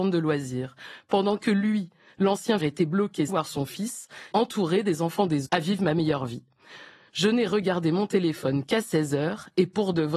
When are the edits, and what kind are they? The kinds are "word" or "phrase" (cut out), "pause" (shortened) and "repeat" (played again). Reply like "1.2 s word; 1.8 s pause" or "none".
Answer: 2.6 s word; 3.3 s word; 4.3 s word; 5.4 s word